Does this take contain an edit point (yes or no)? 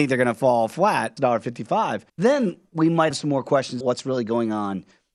yes